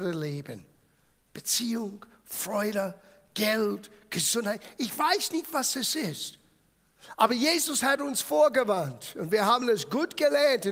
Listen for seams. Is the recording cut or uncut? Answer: uncut